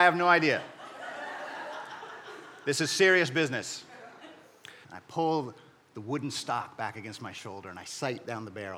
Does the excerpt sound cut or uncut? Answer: cut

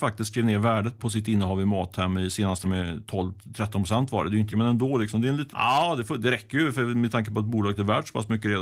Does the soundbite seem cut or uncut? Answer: cut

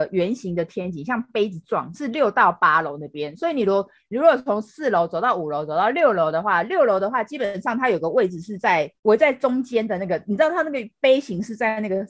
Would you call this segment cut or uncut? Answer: uncut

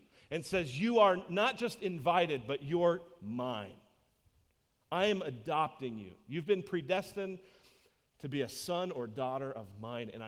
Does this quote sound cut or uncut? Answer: uncut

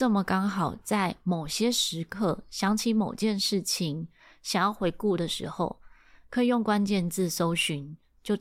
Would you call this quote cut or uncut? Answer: uncut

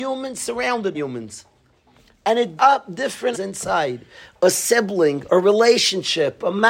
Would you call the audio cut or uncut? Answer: cut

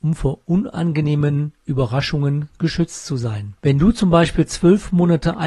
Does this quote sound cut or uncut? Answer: cut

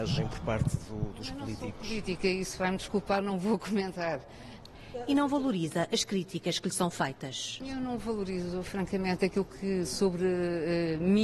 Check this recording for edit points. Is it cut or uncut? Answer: uncut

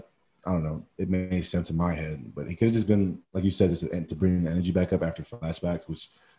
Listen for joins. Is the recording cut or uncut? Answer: uncut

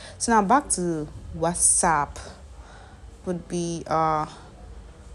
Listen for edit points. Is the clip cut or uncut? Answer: cut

